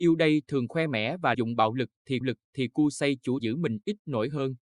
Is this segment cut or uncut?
cut